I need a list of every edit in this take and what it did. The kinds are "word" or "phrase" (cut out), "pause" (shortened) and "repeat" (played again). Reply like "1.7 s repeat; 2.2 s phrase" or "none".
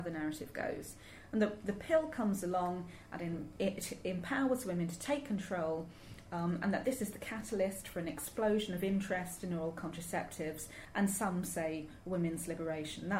none